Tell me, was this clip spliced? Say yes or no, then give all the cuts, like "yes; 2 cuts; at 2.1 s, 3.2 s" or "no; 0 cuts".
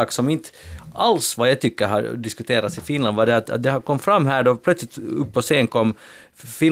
no; 0 cuts